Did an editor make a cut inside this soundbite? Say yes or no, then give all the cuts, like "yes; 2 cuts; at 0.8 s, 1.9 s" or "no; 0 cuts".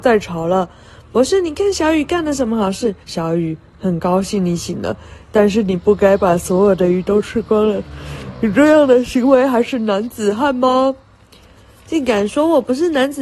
yes; 1 cut; at 3.0 s